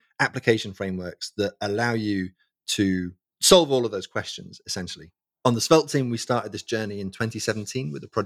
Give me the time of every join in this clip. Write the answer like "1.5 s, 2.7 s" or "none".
none